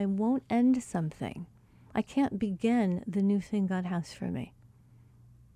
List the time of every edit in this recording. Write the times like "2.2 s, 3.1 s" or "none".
none